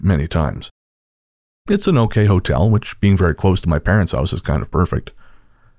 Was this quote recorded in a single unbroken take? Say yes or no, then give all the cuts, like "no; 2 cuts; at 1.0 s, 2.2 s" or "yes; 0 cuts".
yes; 0 cuts